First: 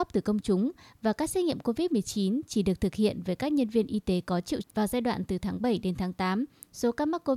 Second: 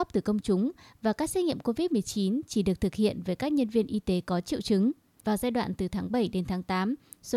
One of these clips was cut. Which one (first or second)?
first